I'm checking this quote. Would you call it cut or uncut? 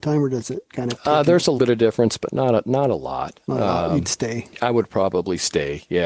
cut